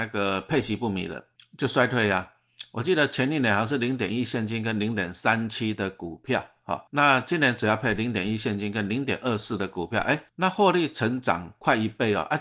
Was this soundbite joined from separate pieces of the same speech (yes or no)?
yes